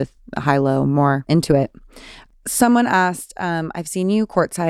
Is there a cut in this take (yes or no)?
no